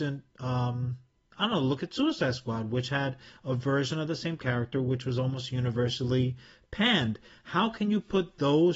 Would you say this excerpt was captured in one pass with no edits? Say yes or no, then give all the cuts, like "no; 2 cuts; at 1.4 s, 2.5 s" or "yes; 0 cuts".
yes; 0 cuts